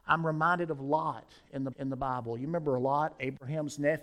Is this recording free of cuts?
no; 1 cut; at 1.7 s

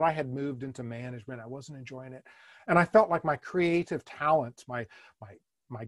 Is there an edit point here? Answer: no; 0 cuts

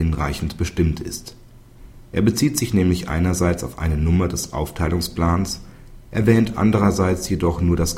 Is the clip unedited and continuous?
yes; 0 cuts

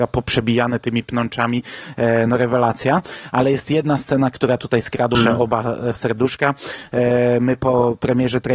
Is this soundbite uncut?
no; 2 cuts; at 5.1 s, 5.9 s

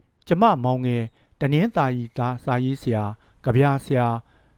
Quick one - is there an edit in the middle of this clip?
no; 0 cuts

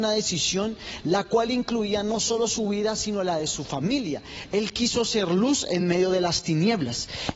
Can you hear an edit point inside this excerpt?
no; 0 cuts

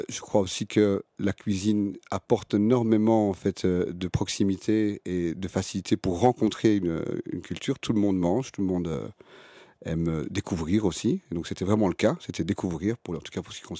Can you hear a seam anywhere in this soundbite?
no; 0 cuts

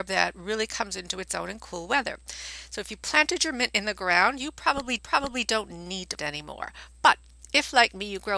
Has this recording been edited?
yes; 2 cuts; at 5.0 s, 6.2 s

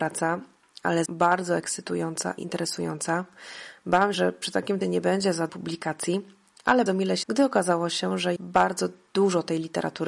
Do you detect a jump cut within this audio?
yes; 8 cuts; at 1.1 s, 2.4 s, 4.1 s, 4.8 s, 5.5 s, 6.9 s, 7.2 s, 8.4 s

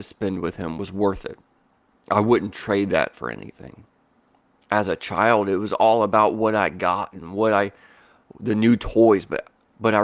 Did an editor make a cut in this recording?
no; 0 cuts

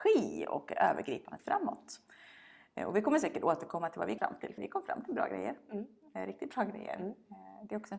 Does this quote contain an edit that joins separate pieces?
yes; 3 cuts; at 1.4 s, 4.2 s, 4.6 s

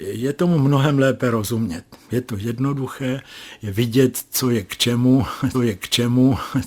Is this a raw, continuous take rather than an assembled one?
no; 1 cut; at 5.5 s

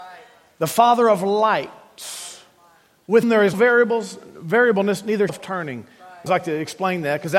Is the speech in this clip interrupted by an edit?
yes; 4 cuts; at 3.2 s, 3.5 s, 5.3 s, 6.3 s

